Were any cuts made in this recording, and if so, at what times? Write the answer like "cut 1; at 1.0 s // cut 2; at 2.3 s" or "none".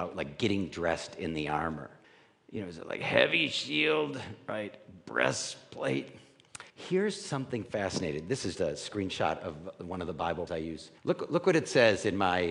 cut 1; at 2.0 s // cut 2; at 6.7 s // cut 3; at 8.5 s // cut 4; at 10.5 s // cut 5; at 11.0 s